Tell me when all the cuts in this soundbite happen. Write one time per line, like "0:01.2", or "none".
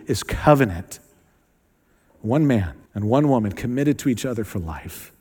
0:02.9